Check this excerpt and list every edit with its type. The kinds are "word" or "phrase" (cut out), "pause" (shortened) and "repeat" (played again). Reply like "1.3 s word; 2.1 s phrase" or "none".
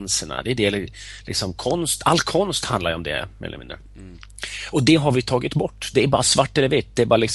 3.9 s pause